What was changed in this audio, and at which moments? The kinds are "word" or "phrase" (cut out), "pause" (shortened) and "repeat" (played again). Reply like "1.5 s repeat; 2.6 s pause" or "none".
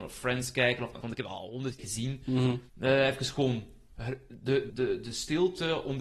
1.0 s word; 1.8 s word; 2.7 s pause; 4.7 s word